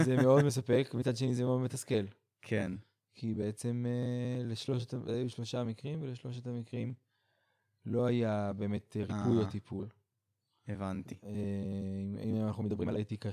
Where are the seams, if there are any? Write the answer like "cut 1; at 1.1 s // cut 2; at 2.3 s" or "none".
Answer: none